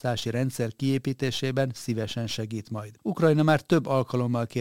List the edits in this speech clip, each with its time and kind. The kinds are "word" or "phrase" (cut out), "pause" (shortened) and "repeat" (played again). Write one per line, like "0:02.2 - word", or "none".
0:03.0 - pause